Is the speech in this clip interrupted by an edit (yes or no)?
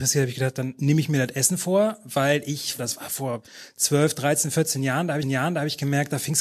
yes